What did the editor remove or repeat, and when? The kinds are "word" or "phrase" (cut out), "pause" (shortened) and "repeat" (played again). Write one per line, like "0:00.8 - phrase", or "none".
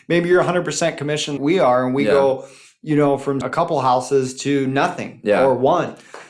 0:01.4 - word
0:03.4 - word